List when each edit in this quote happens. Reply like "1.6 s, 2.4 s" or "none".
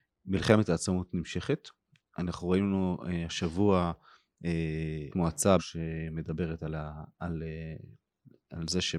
5.1 s, 5.6 s